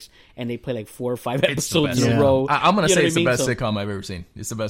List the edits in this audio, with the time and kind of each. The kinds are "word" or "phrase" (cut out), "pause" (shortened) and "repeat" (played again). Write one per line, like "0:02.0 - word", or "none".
none